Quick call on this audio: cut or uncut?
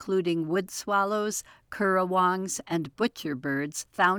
uncut